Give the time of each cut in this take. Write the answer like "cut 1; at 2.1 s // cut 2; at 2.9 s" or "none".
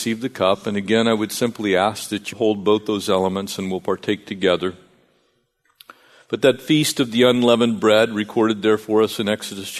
cut 1; at 2.3 s